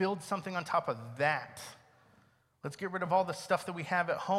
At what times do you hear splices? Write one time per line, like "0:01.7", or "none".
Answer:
none